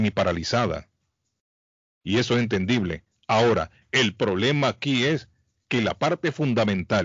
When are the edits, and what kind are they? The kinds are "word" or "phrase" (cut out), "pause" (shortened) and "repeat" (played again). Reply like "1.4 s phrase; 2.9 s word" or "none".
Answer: none

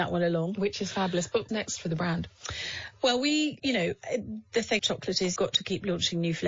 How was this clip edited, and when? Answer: 1.5 s word; 3.6 s word; 4.8 s word; 5.4 s word

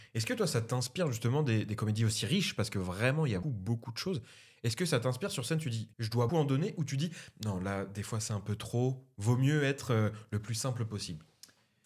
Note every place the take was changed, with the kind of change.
3.4 s word; 5.9 s pause; 6.3 s word

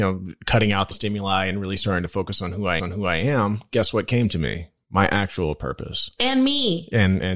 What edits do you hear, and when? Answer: 0.9 s word; 2.8 s repeat

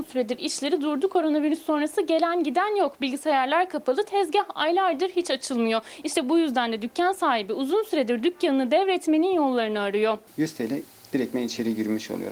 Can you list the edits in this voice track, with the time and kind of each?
none

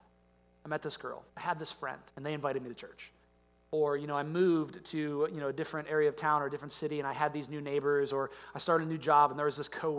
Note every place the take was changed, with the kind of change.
1.3 s pause; 2.1 s pause

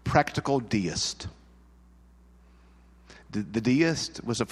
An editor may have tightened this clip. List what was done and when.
none

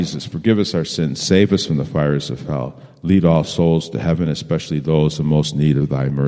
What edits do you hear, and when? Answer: none

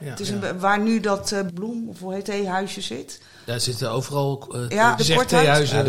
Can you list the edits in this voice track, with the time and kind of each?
1.5 s word; 2.2 s word; 5.0 s word

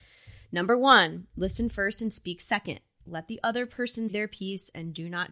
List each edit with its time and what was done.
4.1 s word

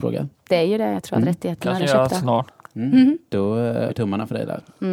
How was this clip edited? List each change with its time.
1.8 s word; 3.9 s word

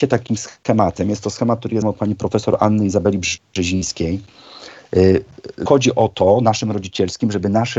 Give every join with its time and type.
1.8 s word; 5.7 s word

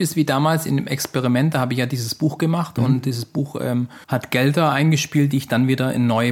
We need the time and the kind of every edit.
4.0 s pause

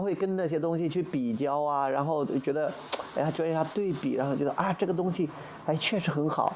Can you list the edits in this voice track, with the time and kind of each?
none

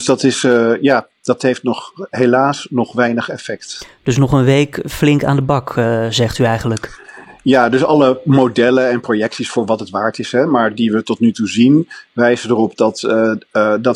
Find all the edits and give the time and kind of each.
none

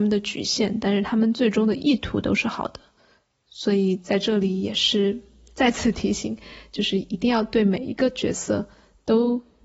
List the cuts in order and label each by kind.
none

